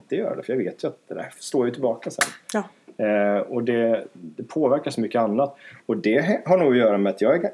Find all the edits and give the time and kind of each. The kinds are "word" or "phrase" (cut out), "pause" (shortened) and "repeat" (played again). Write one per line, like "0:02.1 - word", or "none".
none

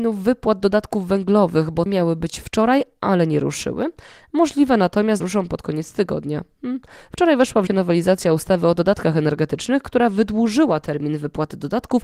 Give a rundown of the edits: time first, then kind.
0:01.9 - word
0:05.2 - word
0:07.7 - word

